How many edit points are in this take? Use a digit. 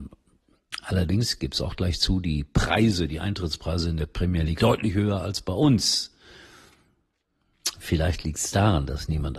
1